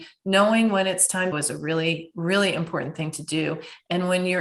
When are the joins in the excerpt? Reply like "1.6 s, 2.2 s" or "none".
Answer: 1.3 s